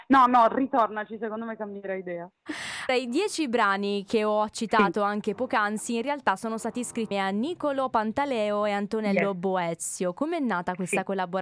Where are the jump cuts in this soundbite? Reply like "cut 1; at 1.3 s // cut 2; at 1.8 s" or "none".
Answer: cut 1; at 2.9 s // cut 2; at 7.1 s